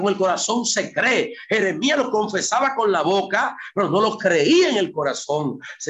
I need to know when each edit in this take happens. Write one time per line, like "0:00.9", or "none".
none